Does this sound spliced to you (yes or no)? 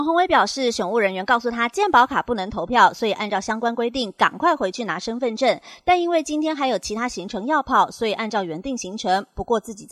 no